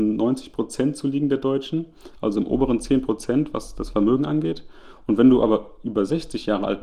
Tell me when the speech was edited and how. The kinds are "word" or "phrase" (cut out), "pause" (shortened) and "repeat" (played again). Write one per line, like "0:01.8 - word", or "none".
none